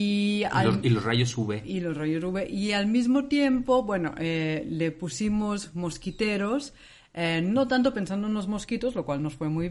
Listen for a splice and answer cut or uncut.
uncut